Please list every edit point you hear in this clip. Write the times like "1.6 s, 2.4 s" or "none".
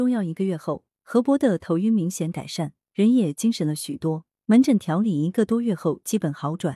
none